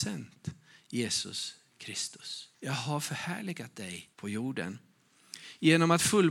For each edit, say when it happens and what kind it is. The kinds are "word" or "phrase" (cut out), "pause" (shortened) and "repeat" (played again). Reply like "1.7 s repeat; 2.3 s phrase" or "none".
2.5 s pause; 4.1 s pause